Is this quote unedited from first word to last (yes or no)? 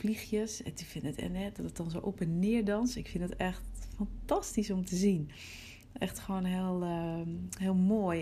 yes